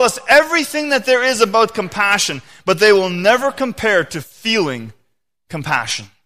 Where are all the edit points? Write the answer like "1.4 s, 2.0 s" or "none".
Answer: none